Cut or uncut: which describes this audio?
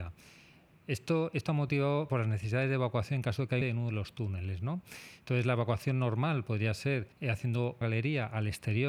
cut